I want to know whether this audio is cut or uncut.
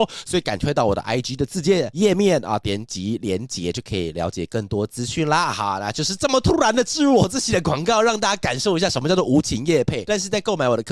uncut